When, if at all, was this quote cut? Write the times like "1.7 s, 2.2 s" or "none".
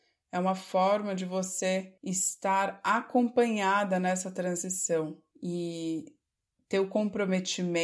2.0 s, 5.3 s